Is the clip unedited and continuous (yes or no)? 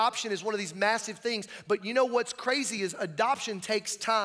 yes